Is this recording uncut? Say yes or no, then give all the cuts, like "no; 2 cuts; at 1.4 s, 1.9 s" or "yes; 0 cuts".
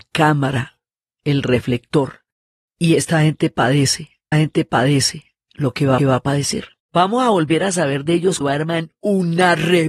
no; 4 cuts; at 4.3 s, 6.0 s, 6.8 s, 8.4 s